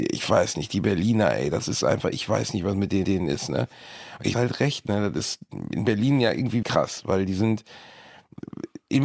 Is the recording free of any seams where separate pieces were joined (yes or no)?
no